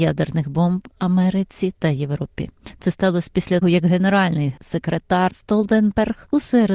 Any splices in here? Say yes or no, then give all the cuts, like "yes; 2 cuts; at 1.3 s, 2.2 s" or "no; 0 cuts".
yes; 2 cuts; at 3.6 s, 5.3 s